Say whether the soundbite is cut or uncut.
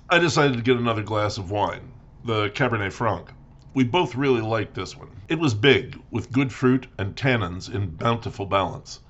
uncut